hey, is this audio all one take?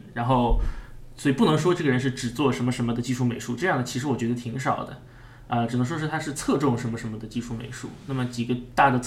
yes; 0 cuts

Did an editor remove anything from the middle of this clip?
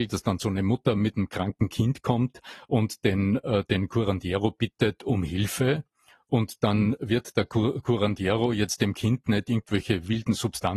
no; 0 cuts

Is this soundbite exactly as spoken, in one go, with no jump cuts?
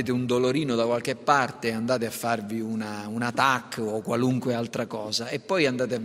yes; 0 cuts

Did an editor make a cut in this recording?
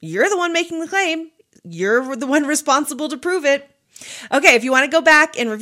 no; 0 cuts

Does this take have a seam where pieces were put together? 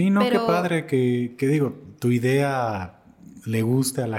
no; 0 cuts

